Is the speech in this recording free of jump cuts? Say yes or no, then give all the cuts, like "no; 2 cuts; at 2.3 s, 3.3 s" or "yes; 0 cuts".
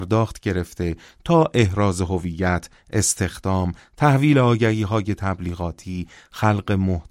yes; 0 cuts